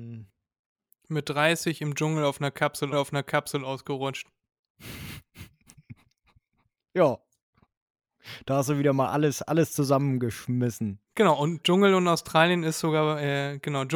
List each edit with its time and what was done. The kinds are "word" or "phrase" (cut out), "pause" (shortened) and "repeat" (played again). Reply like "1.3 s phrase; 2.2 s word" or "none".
2.9 s repeat; 11.0 s pause